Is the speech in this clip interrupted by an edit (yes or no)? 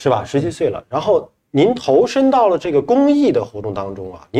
no